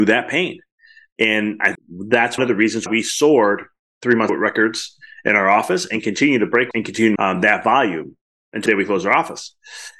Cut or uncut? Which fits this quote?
cut